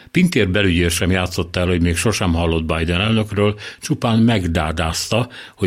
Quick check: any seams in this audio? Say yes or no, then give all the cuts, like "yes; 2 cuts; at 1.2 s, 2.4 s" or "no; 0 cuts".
no; 0 cuts